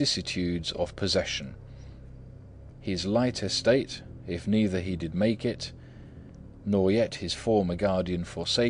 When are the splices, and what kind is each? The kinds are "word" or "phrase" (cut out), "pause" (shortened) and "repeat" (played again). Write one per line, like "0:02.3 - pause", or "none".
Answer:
none